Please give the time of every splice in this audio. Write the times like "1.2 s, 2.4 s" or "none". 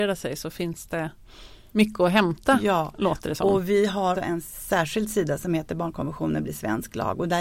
4.1 s